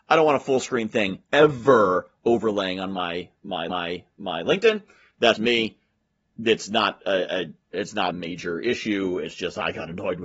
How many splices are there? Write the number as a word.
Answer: five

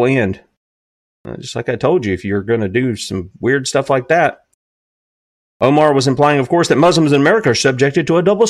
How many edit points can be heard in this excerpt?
zero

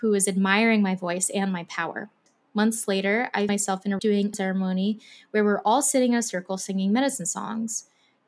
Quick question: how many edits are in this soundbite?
three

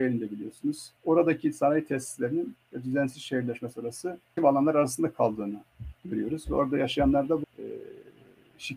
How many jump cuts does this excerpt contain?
four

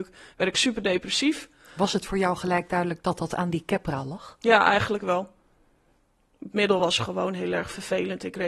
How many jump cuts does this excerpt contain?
zero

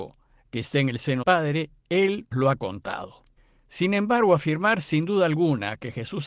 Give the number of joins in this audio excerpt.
three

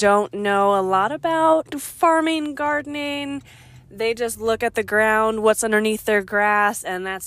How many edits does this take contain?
zero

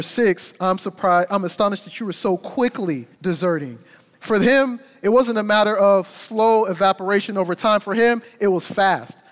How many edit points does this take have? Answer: one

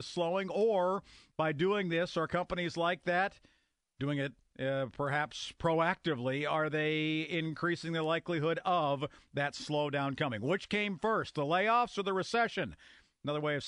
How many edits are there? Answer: zero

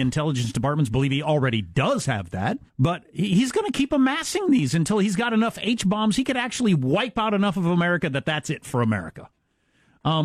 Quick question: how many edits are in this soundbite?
one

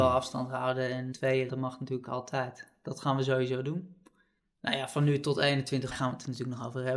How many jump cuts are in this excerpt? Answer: four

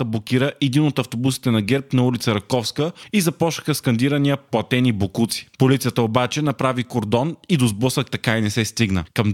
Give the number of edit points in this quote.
zero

